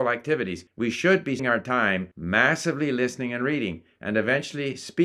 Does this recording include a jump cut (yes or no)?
yes